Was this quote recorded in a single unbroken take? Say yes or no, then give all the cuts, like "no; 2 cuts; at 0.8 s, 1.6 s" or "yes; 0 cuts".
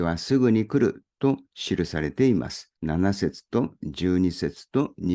no; 1 cut; at 2.8 s